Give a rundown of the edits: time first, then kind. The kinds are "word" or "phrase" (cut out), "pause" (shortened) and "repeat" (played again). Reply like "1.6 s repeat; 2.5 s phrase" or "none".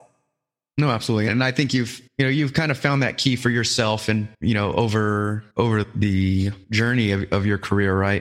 2.1 s pause; 4.3 s pause; 5.5 s pause; 6.6 s pause